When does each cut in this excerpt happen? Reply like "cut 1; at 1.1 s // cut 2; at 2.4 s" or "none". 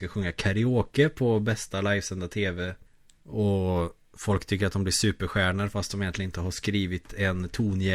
cut 1; at 2.9 s